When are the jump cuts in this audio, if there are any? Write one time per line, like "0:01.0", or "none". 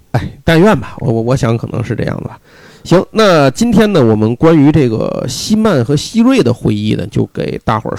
none